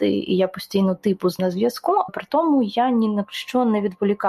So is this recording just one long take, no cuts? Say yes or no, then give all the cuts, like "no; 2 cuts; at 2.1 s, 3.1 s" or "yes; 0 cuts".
no; 2 cuts; at 1.4 s, 2.1 s